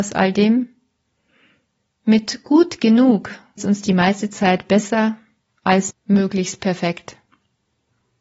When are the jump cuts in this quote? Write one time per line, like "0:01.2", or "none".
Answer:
0:03.6
0:05.9